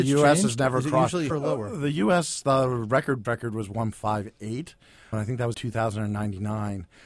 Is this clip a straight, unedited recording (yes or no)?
no